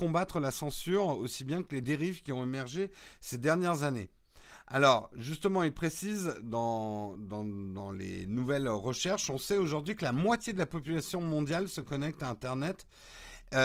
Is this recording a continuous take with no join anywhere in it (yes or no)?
yes